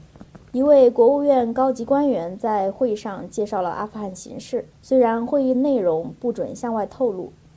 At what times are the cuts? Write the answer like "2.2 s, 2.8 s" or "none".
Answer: 4.7 s